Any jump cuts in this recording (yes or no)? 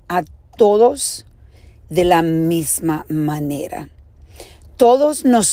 no